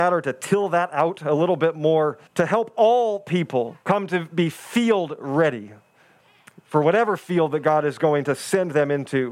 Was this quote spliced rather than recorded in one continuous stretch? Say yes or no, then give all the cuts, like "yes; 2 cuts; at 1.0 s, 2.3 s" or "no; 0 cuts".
yes; 2 cuts; at 2.3 s, 3.8 s